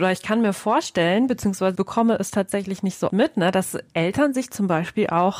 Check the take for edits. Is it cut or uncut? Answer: cut